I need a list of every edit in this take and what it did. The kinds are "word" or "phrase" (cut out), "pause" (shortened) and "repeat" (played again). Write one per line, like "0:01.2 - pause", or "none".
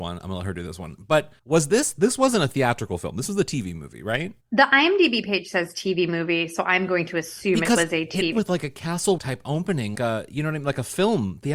0:01.4 - pause
0:04.4 - pause
0:08.3 - word
0:09.2 - word
0:09.9 - word